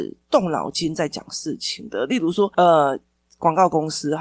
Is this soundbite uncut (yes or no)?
yes